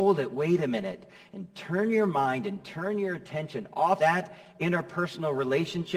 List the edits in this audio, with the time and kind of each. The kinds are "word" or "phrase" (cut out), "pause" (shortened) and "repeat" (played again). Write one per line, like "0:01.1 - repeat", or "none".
0:04.0 - word